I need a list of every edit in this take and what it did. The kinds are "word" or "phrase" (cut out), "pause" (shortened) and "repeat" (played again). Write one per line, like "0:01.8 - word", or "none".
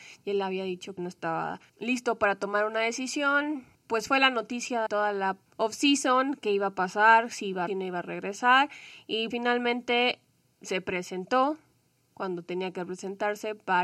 0:01.0 - phrase
0:01.7 - pause
0:04.9 - word
0:05.5 - pause
0:07.7 - phrase
0:09.3 - word